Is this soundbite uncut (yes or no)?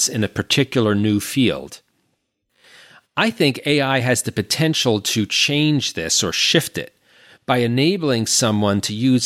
yes